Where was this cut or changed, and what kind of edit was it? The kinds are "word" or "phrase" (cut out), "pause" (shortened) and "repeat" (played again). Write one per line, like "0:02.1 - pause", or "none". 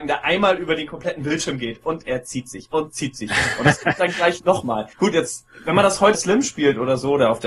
0:04.9 - pause
0:06.1 - phrase